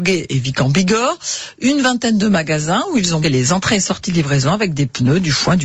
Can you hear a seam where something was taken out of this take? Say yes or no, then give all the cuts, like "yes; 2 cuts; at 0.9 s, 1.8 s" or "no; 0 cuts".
yes; 1 cut; at 3.2 s